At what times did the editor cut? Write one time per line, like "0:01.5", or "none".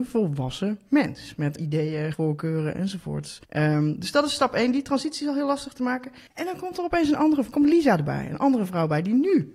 0:01.6
0:02.1
0:03.4
0:06.3